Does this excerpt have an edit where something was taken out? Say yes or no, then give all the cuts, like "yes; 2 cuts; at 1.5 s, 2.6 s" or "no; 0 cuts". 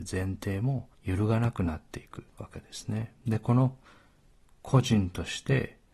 yes; 3 cuts; at 0.9 s, 2.3 s, 3.2 s